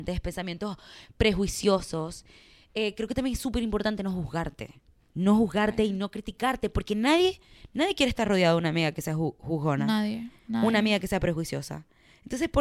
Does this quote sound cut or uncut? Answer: uncut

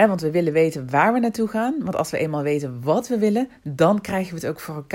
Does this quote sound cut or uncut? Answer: uncut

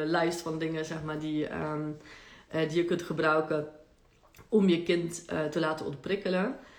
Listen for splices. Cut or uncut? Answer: uncut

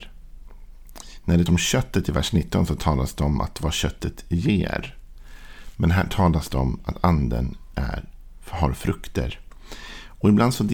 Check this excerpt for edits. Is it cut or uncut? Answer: cut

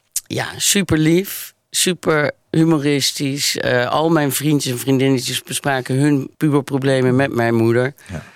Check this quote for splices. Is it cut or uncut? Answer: cut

